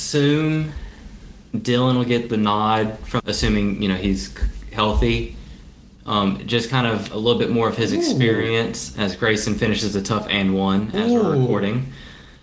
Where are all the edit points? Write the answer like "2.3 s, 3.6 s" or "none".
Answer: 3.2 s

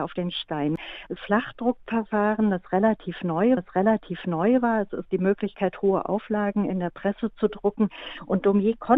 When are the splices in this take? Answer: 1.2 s, 3.6 s, 5.1 s

